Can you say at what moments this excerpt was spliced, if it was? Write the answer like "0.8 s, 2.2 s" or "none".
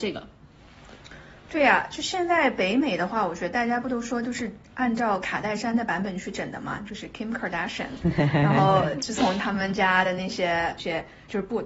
none